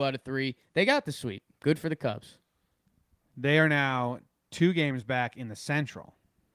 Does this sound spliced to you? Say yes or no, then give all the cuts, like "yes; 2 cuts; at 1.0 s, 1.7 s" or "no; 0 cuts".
no; 0 cuts